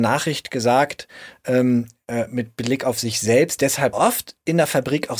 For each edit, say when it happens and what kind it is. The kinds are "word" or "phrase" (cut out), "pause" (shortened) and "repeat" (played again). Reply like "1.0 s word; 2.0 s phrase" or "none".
3.9 s phrase